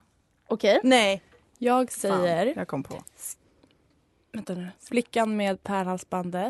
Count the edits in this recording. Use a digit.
1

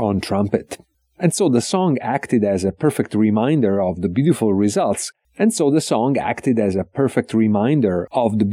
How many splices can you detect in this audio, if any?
0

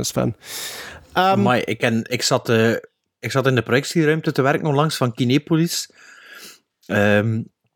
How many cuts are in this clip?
0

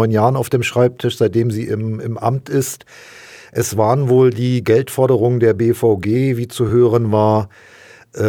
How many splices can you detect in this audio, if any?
0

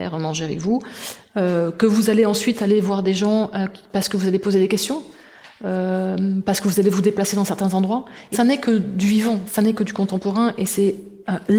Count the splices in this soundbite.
1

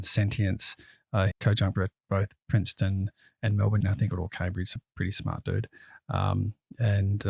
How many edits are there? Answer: 5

